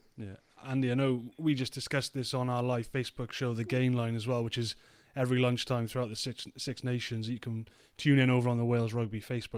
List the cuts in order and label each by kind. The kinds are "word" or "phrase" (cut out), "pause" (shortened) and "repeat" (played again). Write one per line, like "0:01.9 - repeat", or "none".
none